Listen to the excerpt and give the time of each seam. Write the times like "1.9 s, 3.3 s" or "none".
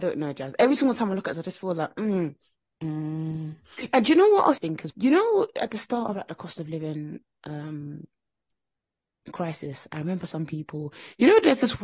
1.3 s, 4.6 s, 4.9 s

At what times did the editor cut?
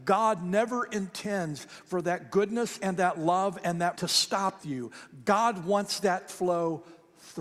3.9 s, 4.6 s, 6.3 s

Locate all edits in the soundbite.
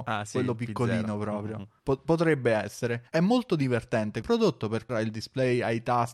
1.8 s, 3.1 s, 4.2 s, 4.9 s

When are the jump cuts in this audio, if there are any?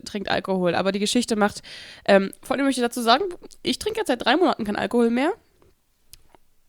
none

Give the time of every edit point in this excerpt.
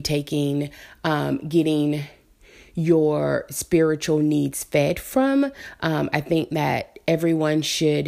none

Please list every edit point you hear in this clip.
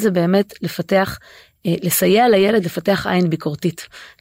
none

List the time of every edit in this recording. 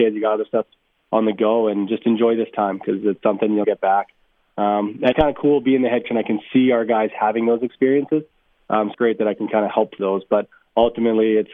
3.6 s, 5.1 s, 6.0 s, 8.9 s, 10.0 s

